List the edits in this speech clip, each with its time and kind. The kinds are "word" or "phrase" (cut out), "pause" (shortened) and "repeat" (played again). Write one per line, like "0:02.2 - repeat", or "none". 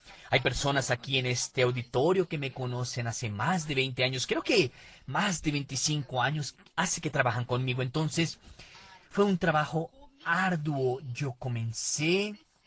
none